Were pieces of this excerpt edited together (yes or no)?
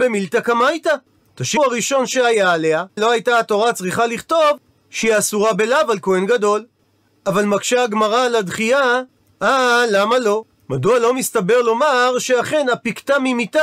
yes